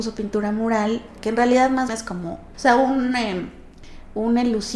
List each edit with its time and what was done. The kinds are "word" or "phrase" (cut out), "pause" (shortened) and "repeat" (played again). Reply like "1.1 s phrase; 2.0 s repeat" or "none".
1.2 s word; 1.9 s word; 2.5 s word